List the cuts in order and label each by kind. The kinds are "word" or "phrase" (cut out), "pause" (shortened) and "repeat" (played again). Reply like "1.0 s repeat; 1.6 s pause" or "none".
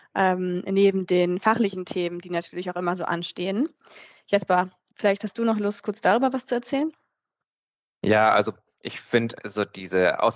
none